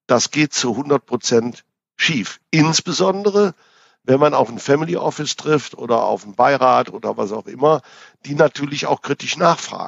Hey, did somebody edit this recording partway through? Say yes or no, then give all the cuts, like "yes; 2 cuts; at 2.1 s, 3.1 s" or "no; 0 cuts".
no; 0 cuts